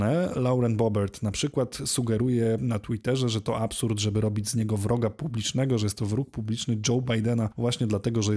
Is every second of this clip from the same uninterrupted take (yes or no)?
yes